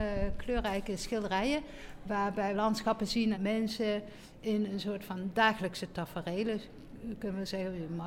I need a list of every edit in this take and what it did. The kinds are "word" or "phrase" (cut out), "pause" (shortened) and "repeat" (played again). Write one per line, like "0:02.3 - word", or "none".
0:02.5 - word
0:03.3 - phrase